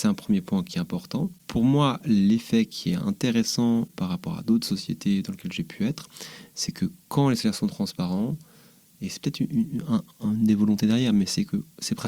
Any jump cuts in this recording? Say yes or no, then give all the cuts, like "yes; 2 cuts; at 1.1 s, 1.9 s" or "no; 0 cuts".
no; 0 cuts